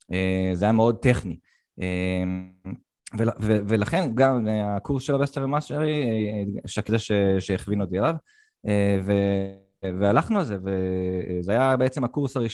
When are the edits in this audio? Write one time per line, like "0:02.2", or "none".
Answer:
0:04.2
0:06.9